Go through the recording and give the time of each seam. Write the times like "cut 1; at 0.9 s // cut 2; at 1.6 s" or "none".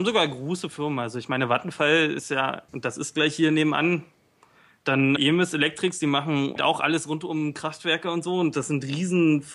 cut 1; at 2.7 s // cut 2; at 5.2 s // cut 3; at 6.6 s